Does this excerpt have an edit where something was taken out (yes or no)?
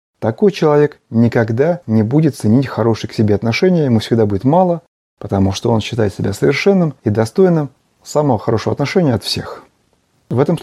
no